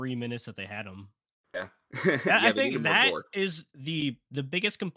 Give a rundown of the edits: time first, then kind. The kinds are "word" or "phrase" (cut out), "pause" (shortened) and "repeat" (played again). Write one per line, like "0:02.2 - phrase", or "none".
none

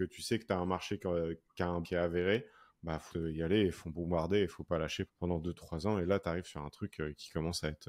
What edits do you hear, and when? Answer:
0:01.8 - word
0:03.1 - word
0:05.1 - word

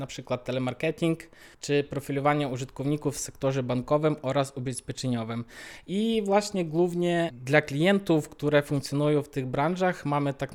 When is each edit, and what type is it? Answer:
0:01.5 - pause

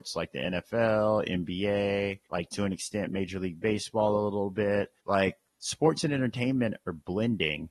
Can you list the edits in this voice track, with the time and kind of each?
0:02.3 - pause
0:05.0 - pause

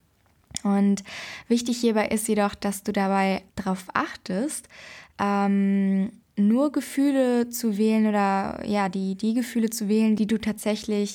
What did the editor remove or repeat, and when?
0:03.5 - pause

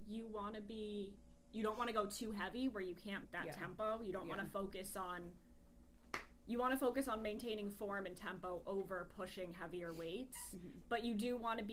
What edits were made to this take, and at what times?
0:03.2 - word

